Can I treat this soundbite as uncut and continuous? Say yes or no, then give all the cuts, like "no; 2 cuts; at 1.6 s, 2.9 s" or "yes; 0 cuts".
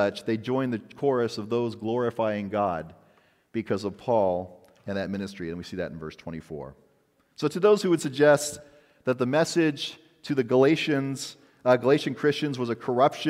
yes; 0 cuts